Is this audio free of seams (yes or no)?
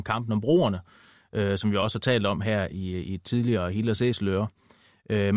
yes